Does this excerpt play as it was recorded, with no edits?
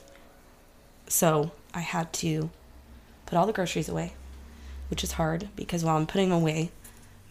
yes; 0 cuts

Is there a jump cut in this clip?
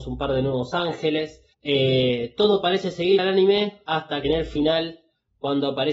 yes; 3 cuts; at 1.5 s, 3.2 s, 4.2 s

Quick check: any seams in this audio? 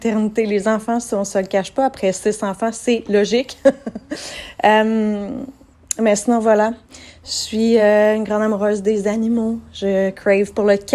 no; 0 cuts

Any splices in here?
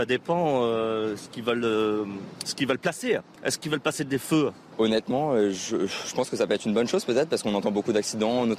no; 0 cuts

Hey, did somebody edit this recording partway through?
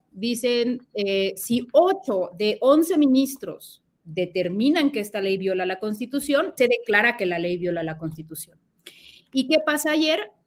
yes; 1 cut; at 6.6 s

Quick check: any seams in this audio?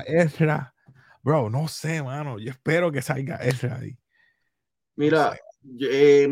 no; 0 cuts

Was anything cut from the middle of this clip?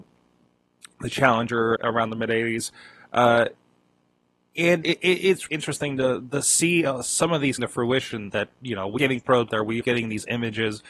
yes; 8 cuts; at 1.8 s, 4.8 s, 5.5 s, 7.6 s, 8.3 s, 9.0 s, 9.5 s, 9.8 s

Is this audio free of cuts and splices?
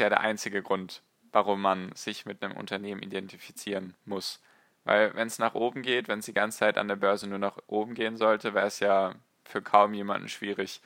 yes; 0 cuts

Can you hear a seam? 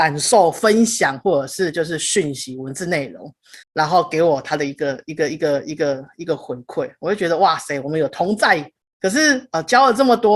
yes; 2 cuts; at 3.6 s, 8.8 s

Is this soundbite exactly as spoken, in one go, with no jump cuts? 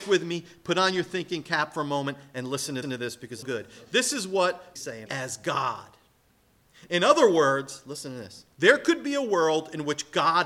no; 5 cuts; at 2.8 s, 3.4 s, 4.8 s, 5.1 s, 8.5 s

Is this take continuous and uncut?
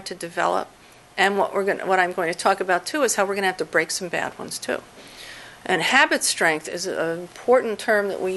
yes; 0 cuts

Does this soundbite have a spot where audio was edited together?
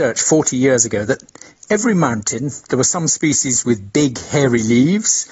no; 0 cuts

